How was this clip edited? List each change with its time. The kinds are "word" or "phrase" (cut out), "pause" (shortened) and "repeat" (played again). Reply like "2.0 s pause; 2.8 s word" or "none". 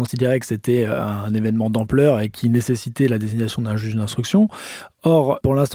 none